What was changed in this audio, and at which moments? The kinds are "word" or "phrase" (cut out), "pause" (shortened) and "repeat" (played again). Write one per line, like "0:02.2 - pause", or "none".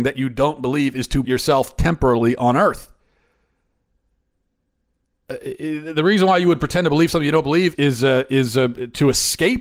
0:01.2 - word
0:07.7 - word